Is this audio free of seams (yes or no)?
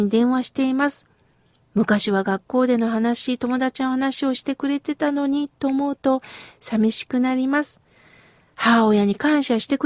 yes